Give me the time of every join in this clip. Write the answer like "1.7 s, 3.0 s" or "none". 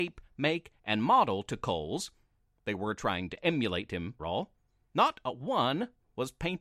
4.2 s